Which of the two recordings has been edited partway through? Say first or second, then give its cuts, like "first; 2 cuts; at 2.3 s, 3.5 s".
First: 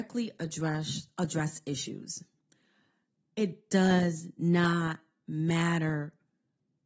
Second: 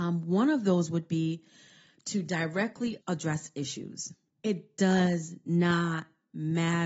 second; 2 cuts; at 3.0 s, 4.3 s